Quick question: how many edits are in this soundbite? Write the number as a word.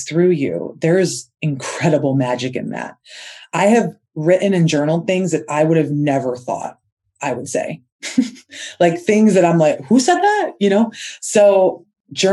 zero